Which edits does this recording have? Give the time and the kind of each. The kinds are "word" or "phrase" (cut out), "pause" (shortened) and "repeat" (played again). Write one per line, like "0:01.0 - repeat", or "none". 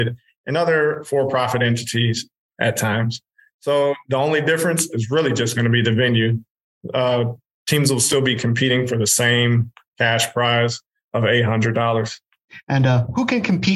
none